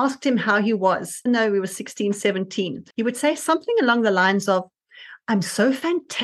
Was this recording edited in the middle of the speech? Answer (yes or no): yes